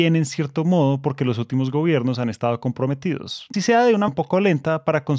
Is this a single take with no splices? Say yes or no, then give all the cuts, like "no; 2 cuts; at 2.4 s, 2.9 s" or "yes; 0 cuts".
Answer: no; 2 cuts; at 3.5 s, 4.1 s